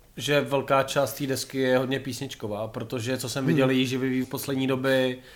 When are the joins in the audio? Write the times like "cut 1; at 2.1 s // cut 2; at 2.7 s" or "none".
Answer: cut 1; at 4.2 s